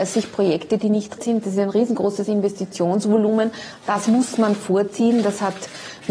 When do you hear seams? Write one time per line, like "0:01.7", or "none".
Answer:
0:01.2